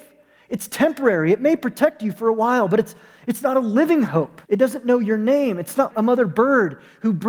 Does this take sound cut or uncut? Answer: cut